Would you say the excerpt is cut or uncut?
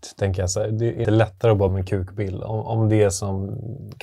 cut